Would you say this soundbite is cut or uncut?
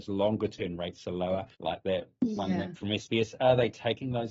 cut